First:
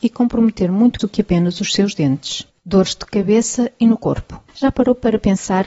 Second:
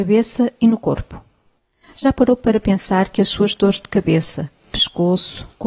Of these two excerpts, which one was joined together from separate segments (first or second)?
first